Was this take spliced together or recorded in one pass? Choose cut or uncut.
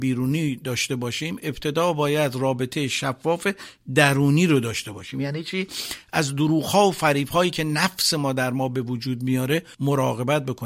uncut